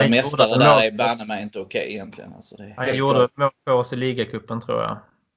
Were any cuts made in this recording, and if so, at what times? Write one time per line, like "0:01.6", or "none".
none